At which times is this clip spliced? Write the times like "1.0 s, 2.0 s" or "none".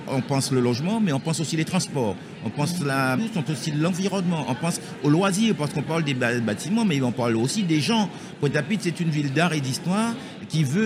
3.2 s, 3.5 s